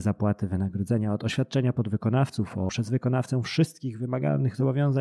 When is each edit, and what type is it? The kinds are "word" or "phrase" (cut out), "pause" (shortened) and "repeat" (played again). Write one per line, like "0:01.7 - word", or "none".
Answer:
0:02.7 - word